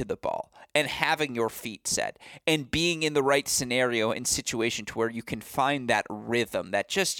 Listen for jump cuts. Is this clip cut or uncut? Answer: uncut